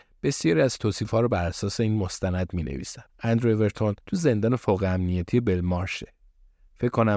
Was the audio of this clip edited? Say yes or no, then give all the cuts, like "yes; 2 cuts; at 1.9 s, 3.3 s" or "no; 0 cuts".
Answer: yes; 2 cuts; at 3.1 s, 4.0 s